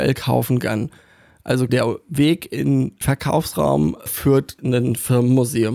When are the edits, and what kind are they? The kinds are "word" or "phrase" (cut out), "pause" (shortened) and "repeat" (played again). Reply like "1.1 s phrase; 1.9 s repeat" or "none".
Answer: 1.7 s word; 3.0 s word; 4.6 s word

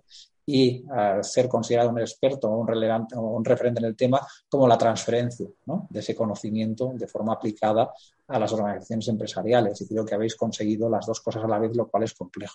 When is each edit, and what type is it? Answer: none

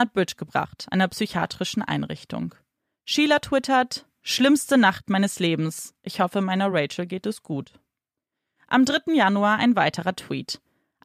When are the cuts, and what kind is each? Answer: none

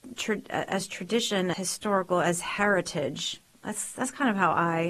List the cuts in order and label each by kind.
1.5 s word

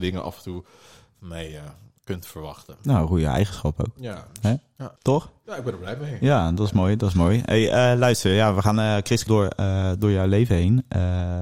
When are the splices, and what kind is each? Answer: 5.0 s pause; 9.3 s word

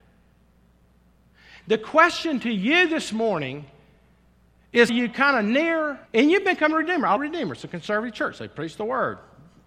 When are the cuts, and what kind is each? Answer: 4.9 s word; 6.1 s pause; 7.2 s word

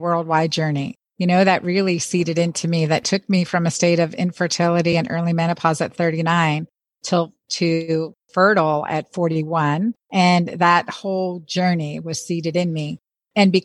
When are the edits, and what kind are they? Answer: none

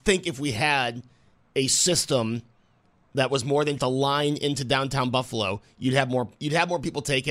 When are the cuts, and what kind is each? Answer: 3.8 s word

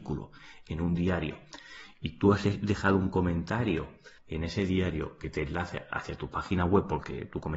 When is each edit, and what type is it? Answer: 4.2 s pause

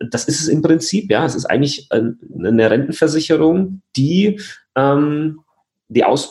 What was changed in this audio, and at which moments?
none

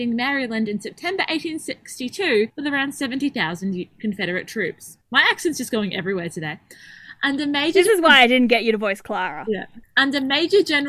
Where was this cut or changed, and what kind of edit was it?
2.5 s pause; 5.0 s pause; 9.8 s pause

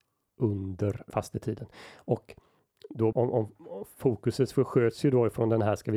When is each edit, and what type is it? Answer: 1.1 s word; 3.1 s word

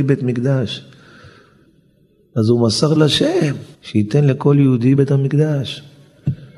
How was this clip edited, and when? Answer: 3.0 s word; 3.7 s pause; 5.0 s word

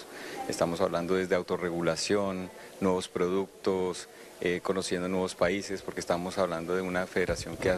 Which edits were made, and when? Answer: none

